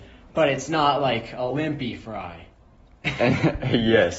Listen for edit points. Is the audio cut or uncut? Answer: uncut